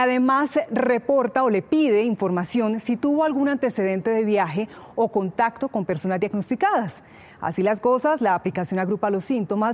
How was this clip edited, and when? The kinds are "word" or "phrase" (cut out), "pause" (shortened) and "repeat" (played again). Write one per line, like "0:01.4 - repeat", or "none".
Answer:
none